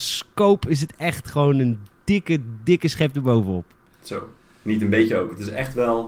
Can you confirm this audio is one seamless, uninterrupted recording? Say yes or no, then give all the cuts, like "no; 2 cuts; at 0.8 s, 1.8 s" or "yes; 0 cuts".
no; 1 cut; at 4.4 s